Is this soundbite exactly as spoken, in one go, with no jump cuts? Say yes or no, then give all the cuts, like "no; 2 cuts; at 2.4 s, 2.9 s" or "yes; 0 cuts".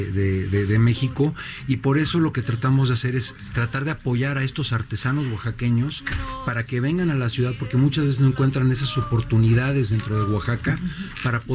yes; 0 cuts